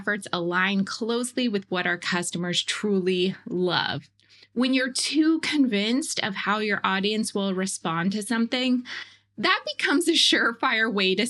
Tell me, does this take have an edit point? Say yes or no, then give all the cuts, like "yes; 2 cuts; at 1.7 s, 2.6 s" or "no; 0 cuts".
no; 0 cuts